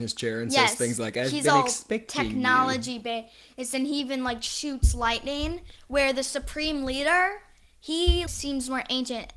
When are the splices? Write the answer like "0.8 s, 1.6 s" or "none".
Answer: 8.3 s